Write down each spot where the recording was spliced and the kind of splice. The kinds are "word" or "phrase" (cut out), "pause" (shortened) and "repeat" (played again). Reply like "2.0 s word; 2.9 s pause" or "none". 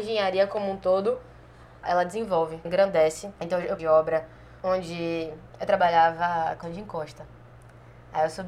1.8 s word; 2.7 s word; 3.4 s pause; 3.8 s phrase; 4.6 s pause; 6.6 s word